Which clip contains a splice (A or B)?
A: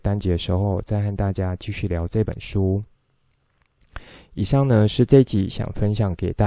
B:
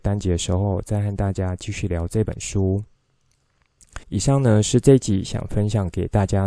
B